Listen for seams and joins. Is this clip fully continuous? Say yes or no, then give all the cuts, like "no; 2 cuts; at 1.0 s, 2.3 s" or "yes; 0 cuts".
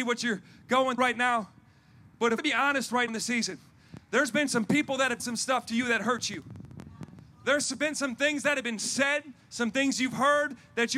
no; 4 cuts; at 1.0 s, 2.4 s, 3.1 s, 5.2 s